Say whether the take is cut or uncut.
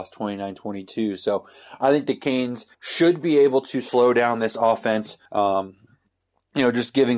cut